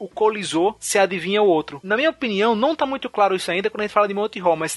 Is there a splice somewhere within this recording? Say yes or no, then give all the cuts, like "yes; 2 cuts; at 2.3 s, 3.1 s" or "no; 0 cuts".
no; 0 cuts